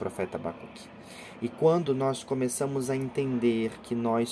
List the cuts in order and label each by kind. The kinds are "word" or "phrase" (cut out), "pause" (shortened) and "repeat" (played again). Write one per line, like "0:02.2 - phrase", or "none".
none